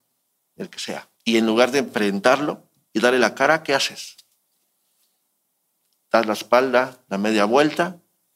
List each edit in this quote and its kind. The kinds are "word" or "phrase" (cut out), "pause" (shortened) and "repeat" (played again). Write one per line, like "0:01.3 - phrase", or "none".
0:01.1 - pause